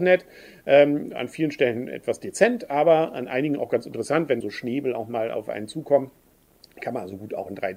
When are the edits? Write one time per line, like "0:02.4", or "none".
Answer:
0:04.4